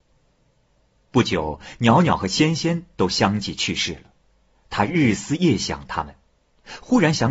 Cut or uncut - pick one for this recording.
uncut